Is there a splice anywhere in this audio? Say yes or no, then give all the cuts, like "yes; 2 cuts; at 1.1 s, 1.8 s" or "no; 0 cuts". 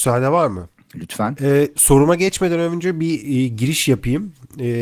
no; 0 cuts